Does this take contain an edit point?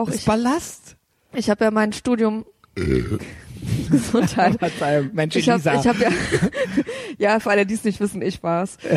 no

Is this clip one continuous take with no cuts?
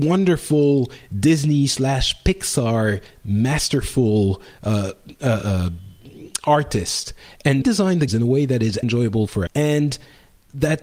no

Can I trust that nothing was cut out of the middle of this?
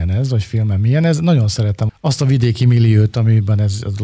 no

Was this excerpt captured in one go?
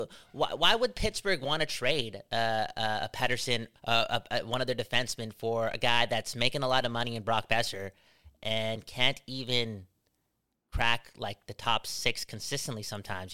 no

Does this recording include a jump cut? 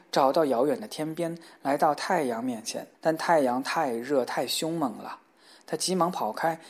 yes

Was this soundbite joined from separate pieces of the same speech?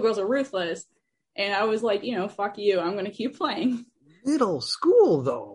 no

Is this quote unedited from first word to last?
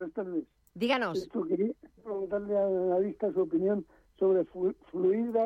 no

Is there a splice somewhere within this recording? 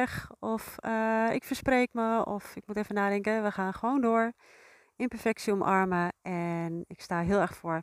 no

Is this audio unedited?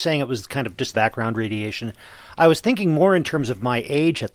no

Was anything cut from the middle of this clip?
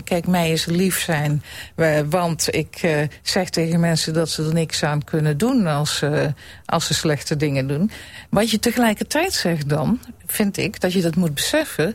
no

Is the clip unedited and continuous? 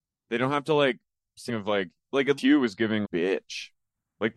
no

